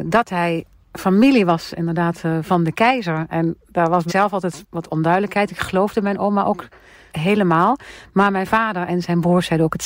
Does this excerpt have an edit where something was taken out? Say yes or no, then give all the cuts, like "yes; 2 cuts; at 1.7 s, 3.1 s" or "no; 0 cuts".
yes; 2 cuts; at 4.1 s, 7.1 s